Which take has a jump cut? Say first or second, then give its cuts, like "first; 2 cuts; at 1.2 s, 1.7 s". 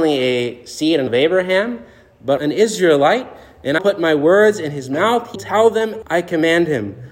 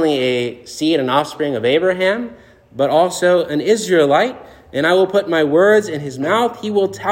first; 5 cuts; at 1.1 s, 2.4 s, 3.8 s, 5.4 s, 6.0 s